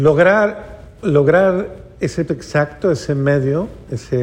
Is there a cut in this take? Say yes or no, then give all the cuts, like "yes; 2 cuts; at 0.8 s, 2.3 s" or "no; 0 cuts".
yes; 1 cut; at 2.3 s